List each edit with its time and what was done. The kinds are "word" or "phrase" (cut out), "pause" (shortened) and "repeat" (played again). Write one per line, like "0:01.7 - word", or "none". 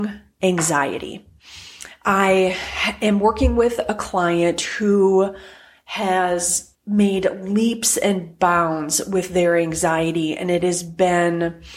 0:06.7 - word